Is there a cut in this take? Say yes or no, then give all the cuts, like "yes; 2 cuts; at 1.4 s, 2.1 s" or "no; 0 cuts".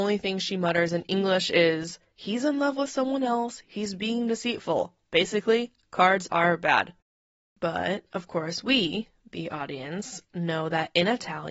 no; 0 cuts